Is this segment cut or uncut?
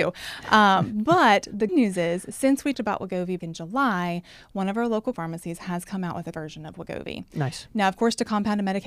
cut